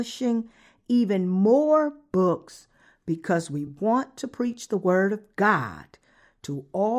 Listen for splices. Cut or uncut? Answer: uncut